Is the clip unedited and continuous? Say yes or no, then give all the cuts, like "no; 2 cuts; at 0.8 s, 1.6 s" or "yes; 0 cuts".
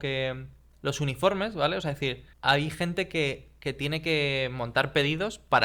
no; 1 cut; at 2.3 s